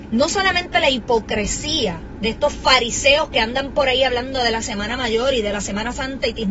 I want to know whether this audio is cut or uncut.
uncut